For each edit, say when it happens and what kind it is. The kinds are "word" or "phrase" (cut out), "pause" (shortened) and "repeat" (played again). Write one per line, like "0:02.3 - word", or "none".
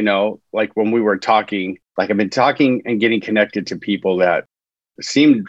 0:01.9 - pause